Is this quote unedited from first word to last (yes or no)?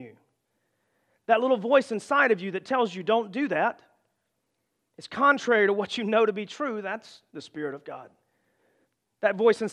yes